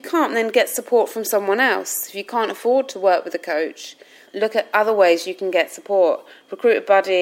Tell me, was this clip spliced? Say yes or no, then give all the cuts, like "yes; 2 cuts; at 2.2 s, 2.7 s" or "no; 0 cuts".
yes; 1 cut; at 4.2 s